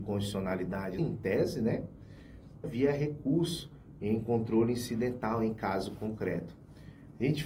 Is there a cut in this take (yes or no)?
yes